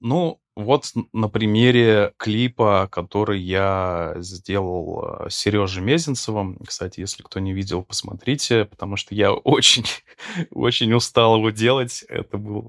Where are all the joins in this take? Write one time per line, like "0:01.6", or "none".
none

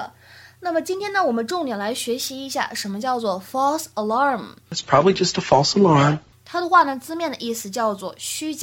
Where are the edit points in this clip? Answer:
none

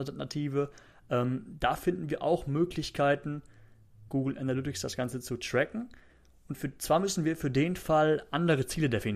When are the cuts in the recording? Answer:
0:04.1

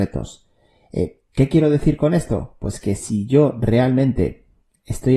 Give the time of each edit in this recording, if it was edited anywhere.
none

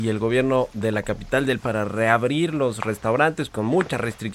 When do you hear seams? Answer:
0:01.6

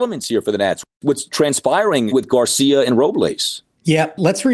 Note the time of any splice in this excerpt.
0:02.1

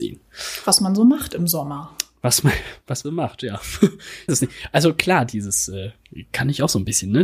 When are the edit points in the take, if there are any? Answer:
0:03.0
0:04.3

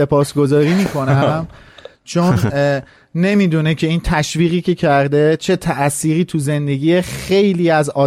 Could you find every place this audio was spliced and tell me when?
none

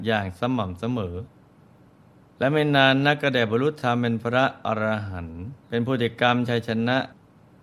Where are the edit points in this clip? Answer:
0:05.6

